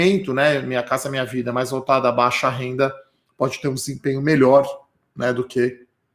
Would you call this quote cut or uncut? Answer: uncut